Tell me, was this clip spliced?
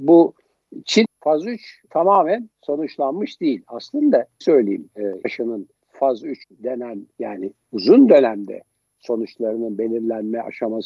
yes; 7 cuts; at 1.0 s, 1.9 s, 2.5 s, 4.4 s, 5.2 s, 5.8 s, 6.4 s

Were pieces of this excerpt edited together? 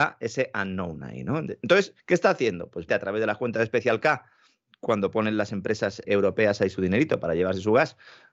yes; 3 cuts; at 2.0 s, 2.9 s, 6.0 s

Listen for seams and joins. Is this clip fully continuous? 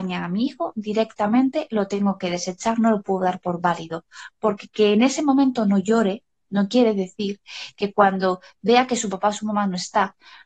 yes; 0 cuts

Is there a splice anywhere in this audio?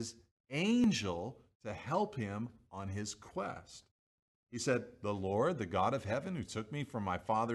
no; 0 cuts

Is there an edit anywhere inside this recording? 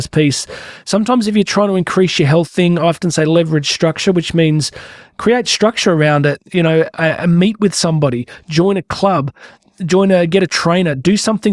no; 0 cuts

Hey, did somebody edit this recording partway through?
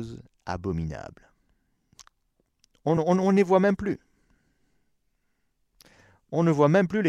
no; 0 cuts

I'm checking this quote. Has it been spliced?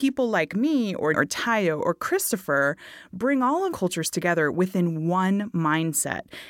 yes; 2 cuts; at 1.1 s, 3.7 s

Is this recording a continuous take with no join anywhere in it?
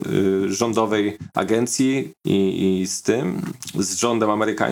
yes; 0 cuts

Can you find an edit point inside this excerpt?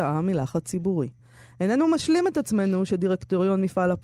no; 0 cuts

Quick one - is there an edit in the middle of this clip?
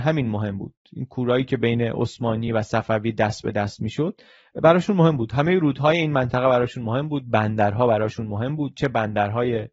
no; 0 cuts

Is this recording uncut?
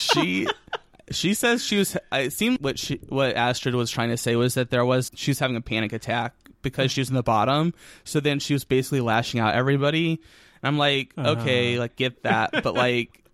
no; 3 cuts; at 2.6 s, 5.1 s, 11.9 s

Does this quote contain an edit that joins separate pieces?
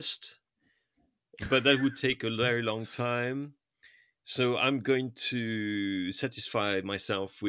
no; 0 cuts

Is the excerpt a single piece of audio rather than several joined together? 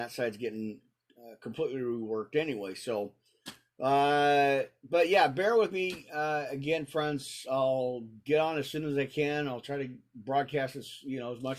yes; 0 cuts

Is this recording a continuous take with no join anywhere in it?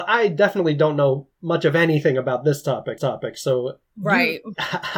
no; 1 cut; at 3.0 s

